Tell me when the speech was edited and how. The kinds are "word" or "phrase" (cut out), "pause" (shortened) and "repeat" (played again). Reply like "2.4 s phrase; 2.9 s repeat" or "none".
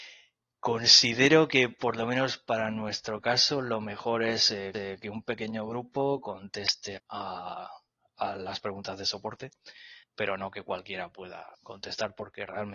4.7 s repeat; 7.0 s word; 10.0 s pause; 11.5 s pause